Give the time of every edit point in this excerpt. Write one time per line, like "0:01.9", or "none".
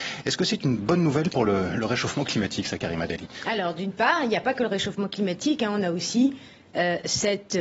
none